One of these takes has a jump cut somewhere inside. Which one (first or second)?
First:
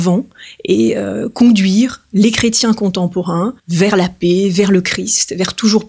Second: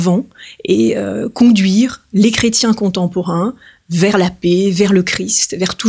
first